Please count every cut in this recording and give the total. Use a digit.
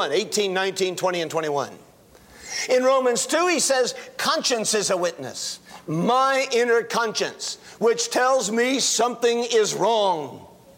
0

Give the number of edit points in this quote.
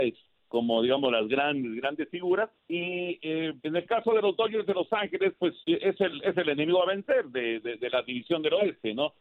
3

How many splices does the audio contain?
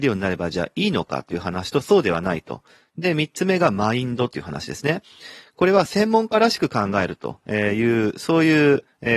0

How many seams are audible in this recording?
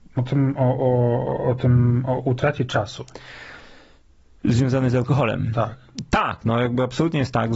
0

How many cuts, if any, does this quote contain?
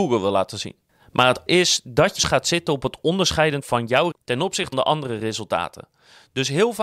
5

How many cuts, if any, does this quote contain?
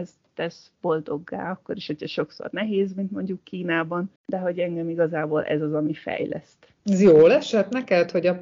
2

